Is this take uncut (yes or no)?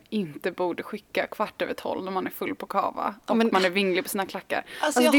yes